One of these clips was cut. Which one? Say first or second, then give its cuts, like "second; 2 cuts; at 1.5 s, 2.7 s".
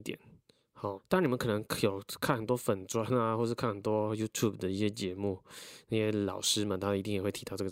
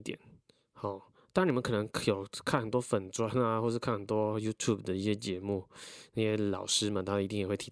first; 1 cut; at 1.0 s